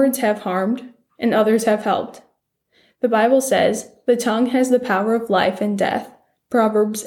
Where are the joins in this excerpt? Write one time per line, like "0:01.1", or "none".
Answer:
none